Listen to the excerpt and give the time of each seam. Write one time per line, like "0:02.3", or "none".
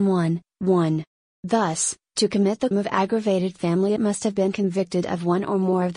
0:02.7
0:04.0

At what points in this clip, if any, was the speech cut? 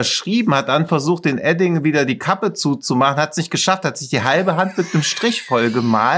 none

